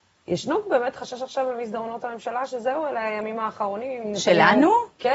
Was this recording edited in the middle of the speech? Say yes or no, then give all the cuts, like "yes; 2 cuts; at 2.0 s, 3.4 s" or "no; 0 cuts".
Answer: no; 0 cuts